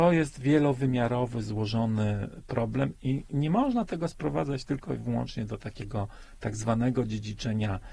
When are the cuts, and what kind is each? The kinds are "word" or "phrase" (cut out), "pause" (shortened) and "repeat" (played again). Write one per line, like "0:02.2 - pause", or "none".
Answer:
none